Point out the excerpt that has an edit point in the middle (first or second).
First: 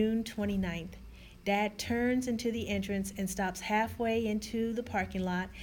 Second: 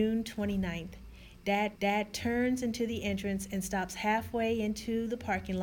second